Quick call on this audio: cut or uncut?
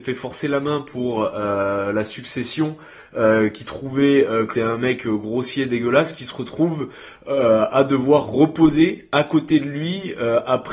cut